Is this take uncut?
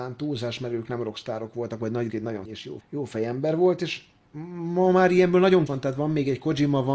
no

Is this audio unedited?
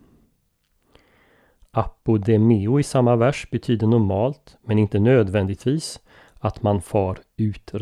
yes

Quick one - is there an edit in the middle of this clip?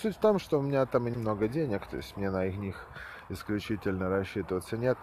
yes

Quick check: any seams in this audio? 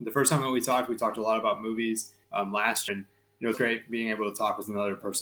yes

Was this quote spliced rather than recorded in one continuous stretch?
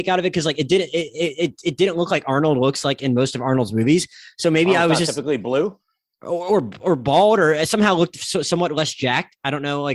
no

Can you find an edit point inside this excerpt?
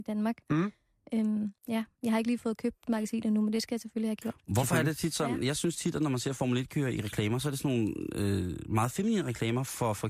yes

